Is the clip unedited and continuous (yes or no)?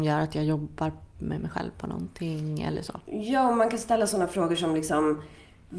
yes